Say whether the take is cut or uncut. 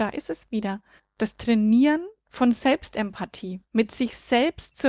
cut